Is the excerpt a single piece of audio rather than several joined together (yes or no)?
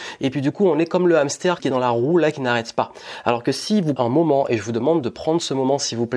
no